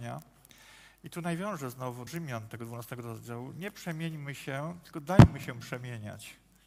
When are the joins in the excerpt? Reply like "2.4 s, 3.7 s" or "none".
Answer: 2.1 s